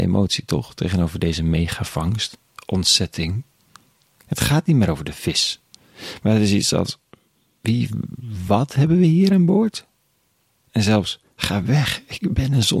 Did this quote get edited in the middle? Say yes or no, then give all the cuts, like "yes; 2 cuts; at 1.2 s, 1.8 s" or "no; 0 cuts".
no; 0 cuts